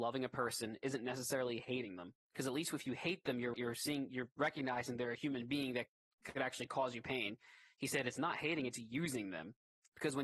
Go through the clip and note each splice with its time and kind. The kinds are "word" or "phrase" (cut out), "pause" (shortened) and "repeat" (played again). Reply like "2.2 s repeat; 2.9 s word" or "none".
3.5 s word